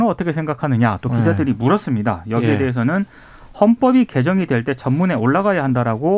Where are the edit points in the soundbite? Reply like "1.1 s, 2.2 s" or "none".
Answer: none